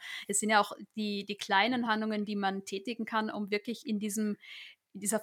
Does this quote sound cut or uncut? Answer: uncut